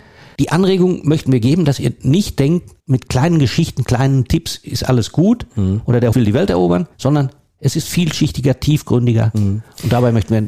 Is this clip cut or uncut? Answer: cut